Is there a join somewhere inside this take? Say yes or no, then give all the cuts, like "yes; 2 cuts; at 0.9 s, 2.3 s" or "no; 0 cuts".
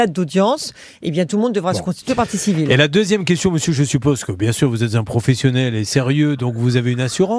no; 0 cuts